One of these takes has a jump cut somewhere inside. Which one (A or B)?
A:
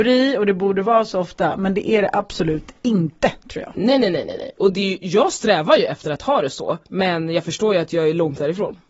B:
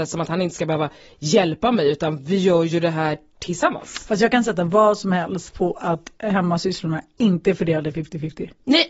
A